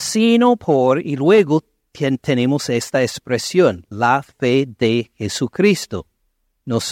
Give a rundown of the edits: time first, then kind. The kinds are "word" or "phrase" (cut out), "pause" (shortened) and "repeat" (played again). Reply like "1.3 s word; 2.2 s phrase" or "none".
none